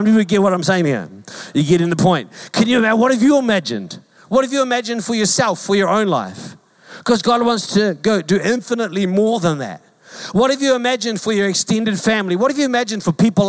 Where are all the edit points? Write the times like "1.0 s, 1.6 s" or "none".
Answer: none

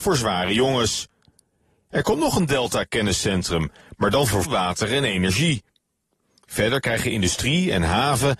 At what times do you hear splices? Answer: 4.4 s

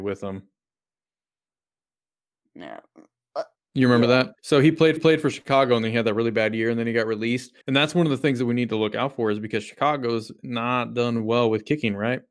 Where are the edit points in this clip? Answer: 3.6 s, 4.4 s, 5.0 s, 7.6 s

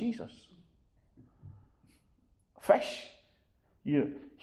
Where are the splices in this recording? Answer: none

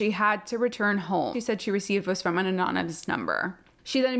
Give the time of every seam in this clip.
1.3 s

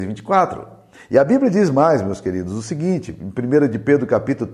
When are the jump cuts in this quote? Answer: none

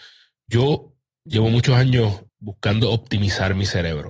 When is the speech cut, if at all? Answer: 2.3 s

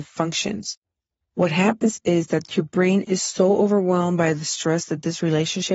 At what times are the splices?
none

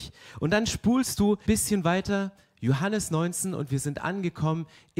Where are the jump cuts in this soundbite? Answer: 1.5 s

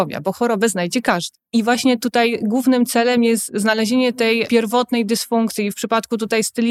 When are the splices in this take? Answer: none

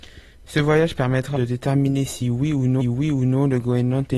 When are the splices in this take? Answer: 1.3 s, 2.8 s

